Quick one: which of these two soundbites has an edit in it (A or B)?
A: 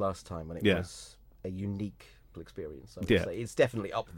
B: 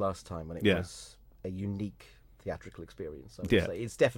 A